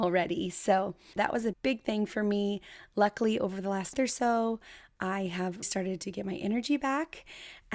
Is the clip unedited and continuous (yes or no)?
no